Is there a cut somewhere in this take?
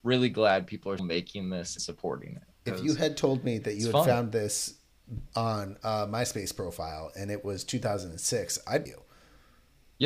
yes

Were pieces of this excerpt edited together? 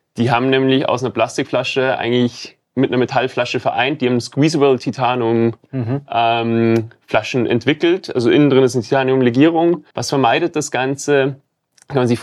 yes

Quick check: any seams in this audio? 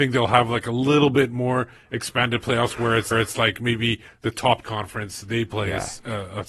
yes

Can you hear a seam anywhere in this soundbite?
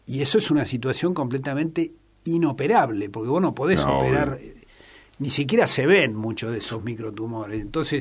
no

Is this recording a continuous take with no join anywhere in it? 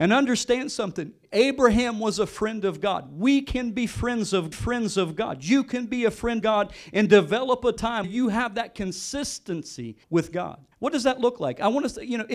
no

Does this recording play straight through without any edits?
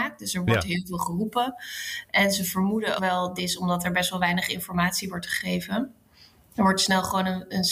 no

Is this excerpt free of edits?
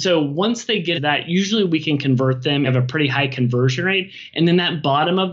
no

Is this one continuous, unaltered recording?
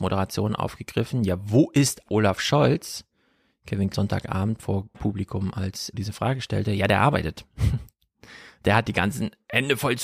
no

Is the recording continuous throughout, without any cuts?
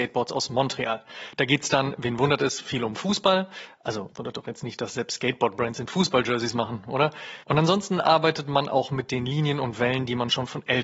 no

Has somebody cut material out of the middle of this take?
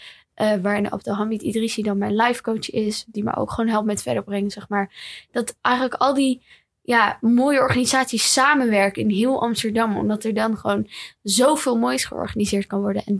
no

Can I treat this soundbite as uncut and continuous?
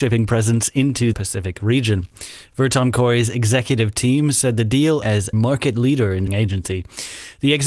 no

